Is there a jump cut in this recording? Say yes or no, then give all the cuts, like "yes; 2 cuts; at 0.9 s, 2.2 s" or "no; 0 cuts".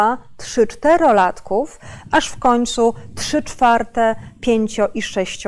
no; 0 cuts